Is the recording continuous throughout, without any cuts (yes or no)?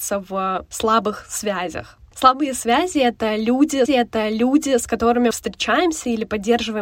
no